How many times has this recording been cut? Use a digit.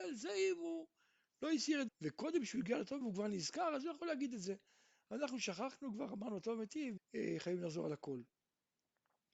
3